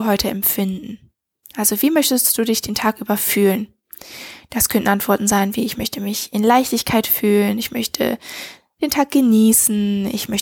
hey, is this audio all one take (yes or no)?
yes